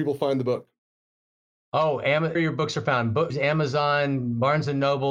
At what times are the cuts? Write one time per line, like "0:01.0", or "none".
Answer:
0:02.3
0:03.3